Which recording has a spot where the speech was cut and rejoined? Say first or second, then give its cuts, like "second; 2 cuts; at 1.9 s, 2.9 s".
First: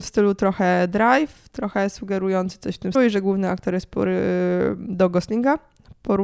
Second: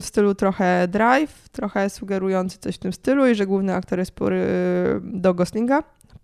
first; 1 cut; at 2.9 s